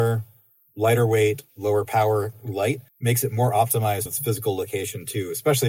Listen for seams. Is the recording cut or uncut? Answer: cut